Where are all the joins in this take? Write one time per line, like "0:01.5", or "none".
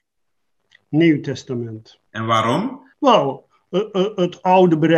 0:02.1
0:02.9